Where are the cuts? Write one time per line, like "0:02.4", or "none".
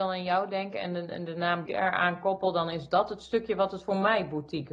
0:01.7